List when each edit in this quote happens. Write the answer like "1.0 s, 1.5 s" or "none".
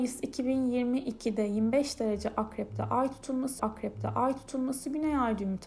3.6 s